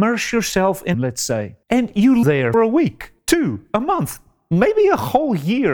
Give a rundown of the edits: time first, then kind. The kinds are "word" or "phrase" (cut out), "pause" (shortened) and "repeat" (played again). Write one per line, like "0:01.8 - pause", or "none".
0:00.9 - word
0:01.6 - pause
0:02.2 - word
0:02.5 - word
0:03.2 - pause